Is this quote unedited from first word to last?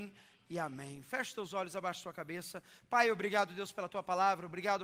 yes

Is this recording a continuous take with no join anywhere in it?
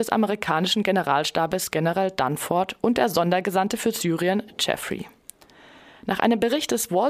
yes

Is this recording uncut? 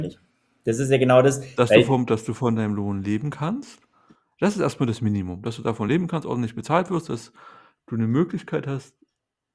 yes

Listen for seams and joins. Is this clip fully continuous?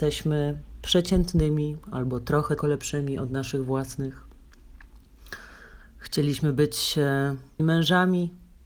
no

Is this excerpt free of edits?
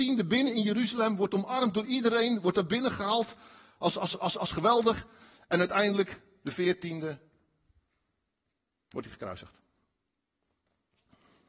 yes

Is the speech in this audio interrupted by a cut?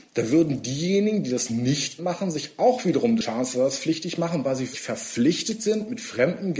yes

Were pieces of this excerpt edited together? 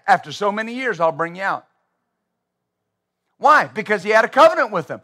no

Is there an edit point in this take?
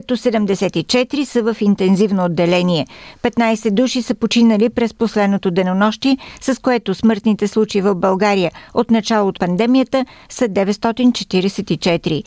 yes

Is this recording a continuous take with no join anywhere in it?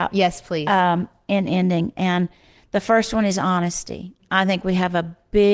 yes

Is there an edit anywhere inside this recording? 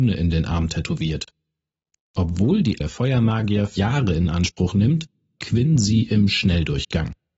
yes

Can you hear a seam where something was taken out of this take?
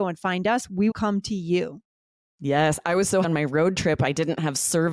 yes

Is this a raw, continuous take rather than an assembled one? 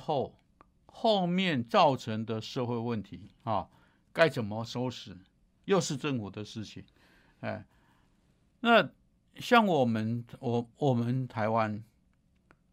no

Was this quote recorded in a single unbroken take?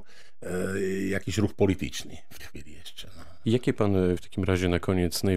no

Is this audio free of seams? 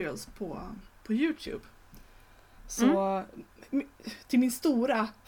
yes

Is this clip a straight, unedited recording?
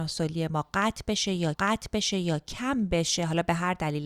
no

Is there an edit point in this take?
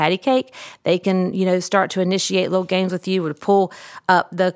no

